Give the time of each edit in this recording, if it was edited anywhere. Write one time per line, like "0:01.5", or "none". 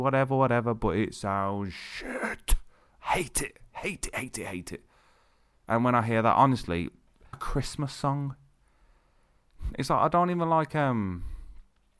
0:07.3